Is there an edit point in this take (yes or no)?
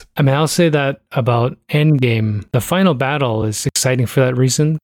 no